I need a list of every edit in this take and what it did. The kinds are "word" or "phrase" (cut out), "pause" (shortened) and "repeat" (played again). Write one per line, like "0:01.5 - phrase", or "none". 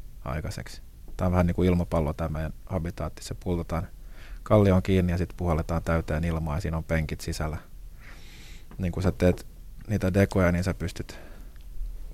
none